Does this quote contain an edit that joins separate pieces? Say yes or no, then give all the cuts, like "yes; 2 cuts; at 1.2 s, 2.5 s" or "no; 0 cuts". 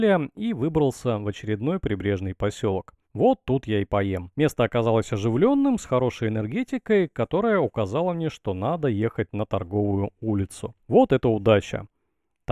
yes; 3 cuts; at 3.0 s, 4.3 s, 10.8 s